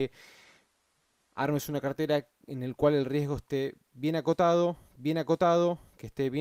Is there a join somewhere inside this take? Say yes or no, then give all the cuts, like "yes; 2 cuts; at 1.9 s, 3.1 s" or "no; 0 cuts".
yes; 1 cut; at 5.0 s